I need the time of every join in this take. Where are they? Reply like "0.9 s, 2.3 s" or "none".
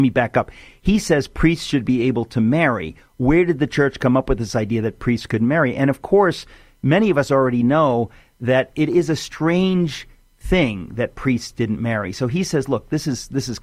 none